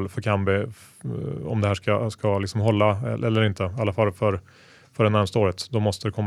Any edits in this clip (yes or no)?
no